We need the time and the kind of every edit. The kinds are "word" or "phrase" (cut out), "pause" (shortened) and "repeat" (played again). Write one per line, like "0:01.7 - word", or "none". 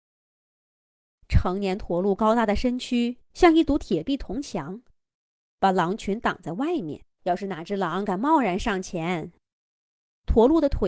0:03.2 - pause
0:07.1 - pause